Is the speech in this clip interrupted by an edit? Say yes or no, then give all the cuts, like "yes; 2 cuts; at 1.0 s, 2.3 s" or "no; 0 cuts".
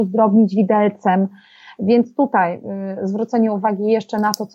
no; 0 cuts